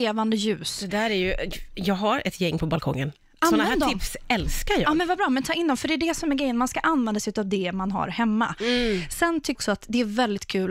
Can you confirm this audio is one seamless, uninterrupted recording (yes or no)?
no